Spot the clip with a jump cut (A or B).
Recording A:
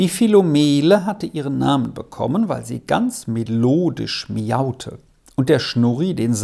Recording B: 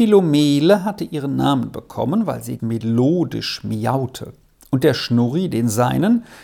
B